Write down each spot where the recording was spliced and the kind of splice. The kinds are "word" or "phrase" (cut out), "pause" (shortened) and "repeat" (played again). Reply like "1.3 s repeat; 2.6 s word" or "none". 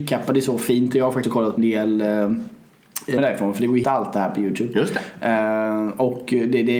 1.2 s word; 1.6 s word; 3.2 s word; 3.8 s word